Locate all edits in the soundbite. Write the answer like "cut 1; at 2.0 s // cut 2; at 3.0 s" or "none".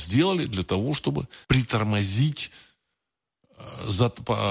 cut 1; at 1.4 s